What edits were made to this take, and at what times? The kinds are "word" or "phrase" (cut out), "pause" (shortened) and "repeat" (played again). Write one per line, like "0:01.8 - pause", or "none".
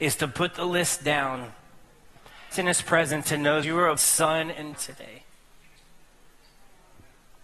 0:02.5 - phrase
0:03.2 - word
0:03.6 - word
0:04.0 - word
0:04.7 - word

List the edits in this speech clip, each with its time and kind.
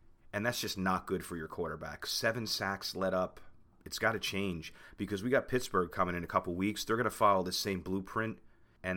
none

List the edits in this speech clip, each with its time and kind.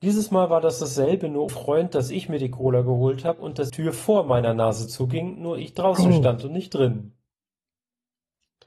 0:01.5 - word
0:03.7 - word

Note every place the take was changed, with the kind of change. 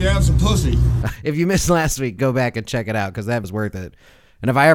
0:01.2 - word
0:02.2 - word
0:03.4 - word

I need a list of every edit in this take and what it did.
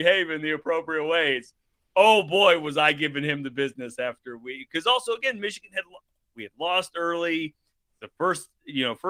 none

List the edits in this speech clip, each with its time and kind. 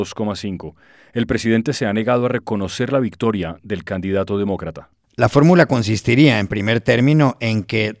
none

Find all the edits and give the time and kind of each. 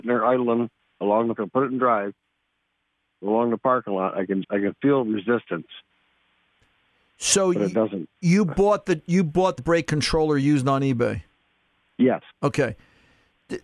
0:01.4 - word
0:04.4 - word
0:09.6 - word

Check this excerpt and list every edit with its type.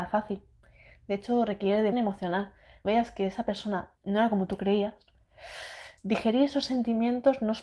0:01.9 - phrase
0:02.8 - phrase
0:04.0 - word
0:06.0 - pause

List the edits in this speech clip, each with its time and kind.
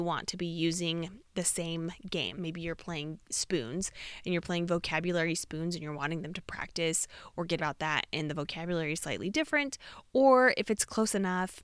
0:02.3 - word
0:07.6 - word

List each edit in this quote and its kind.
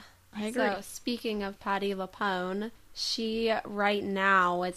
none

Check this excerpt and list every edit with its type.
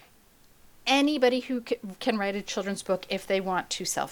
none

